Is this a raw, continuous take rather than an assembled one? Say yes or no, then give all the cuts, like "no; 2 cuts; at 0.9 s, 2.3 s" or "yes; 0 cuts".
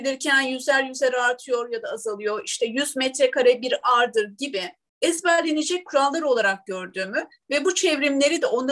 yes; 0 cuts